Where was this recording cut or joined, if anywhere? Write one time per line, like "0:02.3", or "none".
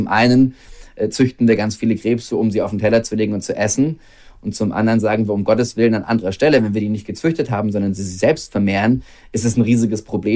none